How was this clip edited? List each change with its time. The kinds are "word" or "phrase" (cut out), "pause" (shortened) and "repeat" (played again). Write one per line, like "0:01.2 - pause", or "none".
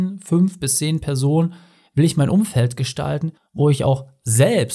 none